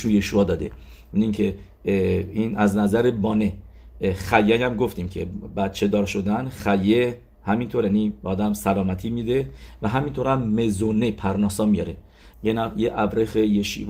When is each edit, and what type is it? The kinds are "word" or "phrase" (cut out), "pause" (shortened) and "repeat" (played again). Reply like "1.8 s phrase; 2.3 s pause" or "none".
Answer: 12.3 s word